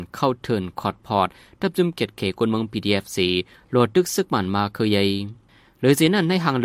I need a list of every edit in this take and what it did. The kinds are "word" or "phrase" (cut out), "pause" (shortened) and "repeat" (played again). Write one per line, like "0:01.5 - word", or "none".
none